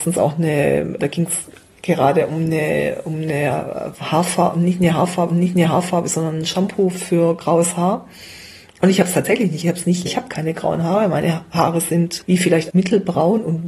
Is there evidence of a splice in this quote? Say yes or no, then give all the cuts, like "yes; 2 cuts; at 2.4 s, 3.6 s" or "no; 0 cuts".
yes; 6 cuts; at 1.0 s, 5.3 s, 9.6 s, 10.1 s, 12.2 s, 12.7 s